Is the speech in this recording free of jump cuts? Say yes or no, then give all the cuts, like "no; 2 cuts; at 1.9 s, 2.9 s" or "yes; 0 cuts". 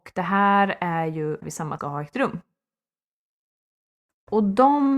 no; 2 cuts; at 1.4 s, 1.8 s